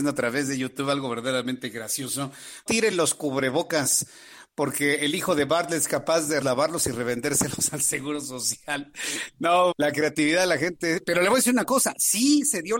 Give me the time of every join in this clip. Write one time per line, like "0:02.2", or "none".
0:02.7
0:06.4
0:09.7